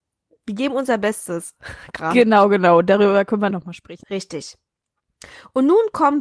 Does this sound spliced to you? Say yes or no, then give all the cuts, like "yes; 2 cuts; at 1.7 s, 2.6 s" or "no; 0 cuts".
yes; 1 cut; at 3.5 s